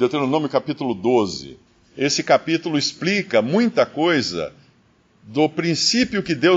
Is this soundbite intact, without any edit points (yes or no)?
yes